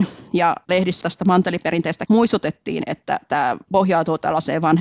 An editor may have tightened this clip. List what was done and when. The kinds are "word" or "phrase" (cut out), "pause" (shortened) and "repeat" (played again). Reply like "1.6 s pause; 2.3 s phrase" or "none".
1.0 s word; 2.1 s word